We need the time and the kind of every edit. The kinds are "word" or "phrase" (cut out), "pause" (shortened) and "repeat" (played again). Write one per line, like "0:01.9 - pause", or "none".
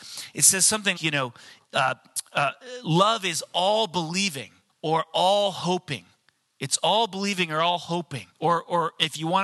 0:01.0 - word
0:04.7 - pause
0:08.3 - pause